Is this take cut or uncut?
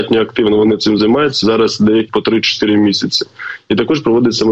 cut